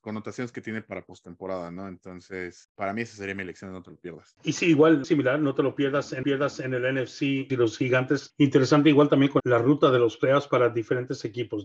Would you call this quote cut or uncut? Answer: cut